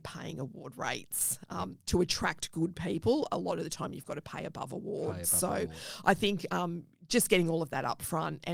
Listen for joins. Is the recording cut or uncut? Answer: uncut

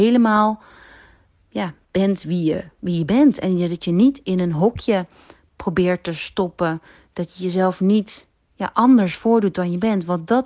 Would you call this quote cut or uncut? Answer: uncut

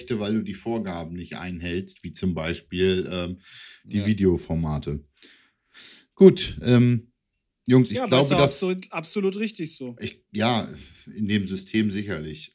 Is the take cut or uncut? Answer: uncut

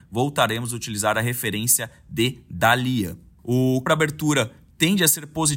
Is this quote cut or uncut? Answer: cut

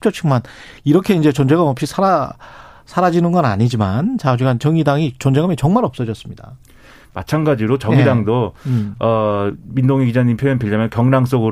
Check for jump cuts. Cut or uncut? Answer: uncut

